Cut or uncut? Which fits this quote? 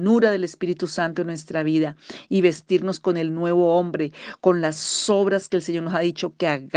uncut